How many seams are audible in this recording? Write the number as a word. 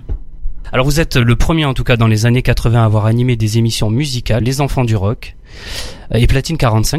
one